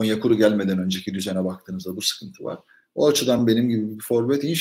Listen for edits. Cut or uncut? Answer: uncut